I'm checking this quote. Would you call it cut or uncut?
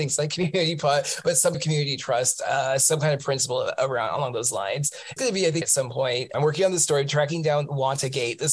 cut